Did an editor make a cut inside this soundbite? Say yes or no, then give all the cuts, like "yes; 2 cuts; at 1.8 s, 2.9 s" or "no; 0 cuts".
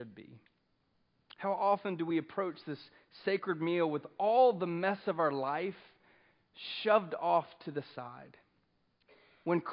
no; 0 cuts